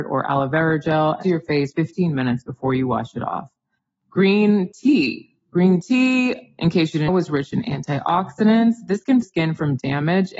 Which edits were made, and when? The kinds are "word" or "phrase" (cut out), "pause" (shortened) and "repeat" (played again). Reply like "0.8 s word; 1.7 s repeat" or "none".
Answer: 1.2 s phrase; 1.7 s word; 3.8 s pause; 7.1 s word; 9.2 s phrase